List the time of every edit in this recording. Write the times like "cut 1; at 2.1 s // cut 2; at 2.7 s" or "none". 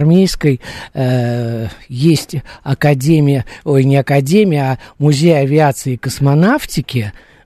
none